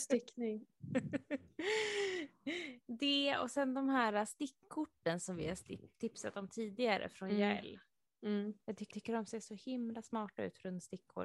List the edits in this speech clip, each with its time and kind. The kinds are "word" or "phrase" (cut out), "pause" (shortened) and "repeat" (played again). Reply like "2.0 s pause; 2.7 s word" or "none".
8.9 s repeat